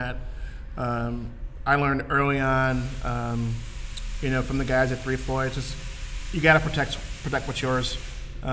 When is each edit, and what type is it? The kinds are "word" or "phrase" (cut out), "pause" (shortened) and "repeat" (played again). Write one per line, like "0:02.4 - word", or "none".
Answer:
none